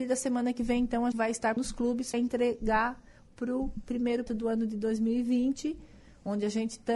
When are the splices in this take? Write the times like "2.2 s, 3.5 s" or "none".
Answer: 1.1 s, 1.6 s, 2.1 s, 3.3 s, 4.3 s